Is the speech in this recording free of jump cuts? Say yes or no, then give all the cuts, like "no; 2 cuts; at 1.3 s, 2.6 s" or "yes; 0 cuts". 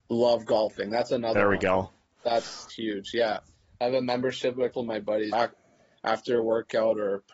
no; 3 cuts; at 2.7 s, 4.7 s, 5.3 s